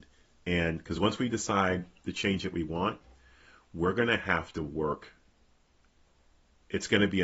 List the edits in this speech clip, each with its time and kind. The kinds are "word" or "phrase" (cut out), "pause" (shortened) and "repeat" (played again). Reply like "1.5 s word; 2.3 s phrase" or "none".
none